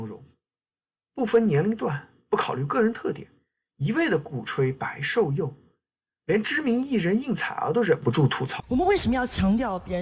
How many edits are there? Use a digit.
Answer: 0